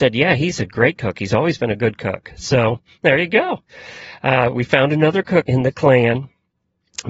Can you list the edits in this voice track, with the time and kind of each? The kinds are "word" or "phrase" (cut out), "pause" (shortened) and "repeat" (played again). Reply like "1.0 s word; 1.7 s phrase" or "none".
5.4 s word